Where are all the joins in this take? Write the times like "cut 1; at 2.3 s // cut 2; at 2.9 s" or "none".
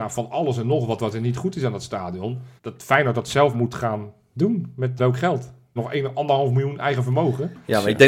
cut 1; at 2.6 s // cut 2; at 3.5 s // cut 3; at 5.0 s // cut 4; at 5.8 s